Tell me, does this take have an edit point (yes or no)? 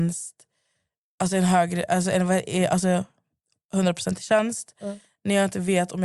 no